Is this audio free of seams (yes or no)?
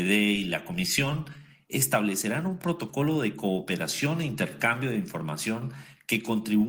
yes